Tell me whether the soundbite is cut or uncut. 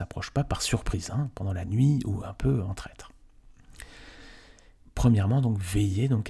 uncut